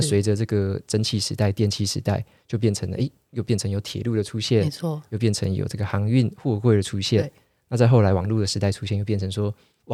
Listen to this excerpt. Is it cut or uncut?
uncut